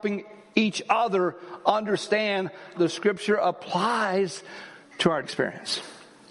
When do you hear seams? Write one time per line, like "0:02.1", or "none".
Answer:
0:02.7
0:05.2